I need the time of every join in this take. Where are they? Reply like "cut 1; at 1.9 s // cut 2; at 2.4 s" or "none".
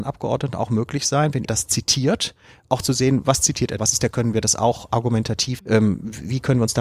cut 1; at 1.4 s // cut 2; at 3.8 s // cut 3; at 4.1 s // cut 4; at 5.6 s